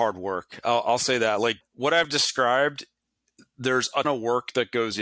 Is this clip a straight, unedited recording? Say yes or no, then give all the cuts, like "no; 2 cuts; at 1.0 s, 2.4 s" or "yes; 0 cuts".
no; 2 cuts; at 1.6 s, 4.0 s